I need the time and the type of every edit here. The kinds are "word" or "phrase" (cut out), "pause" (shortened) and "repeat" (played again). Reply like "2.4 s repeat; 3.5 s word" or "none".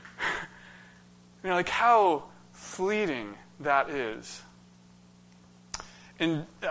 none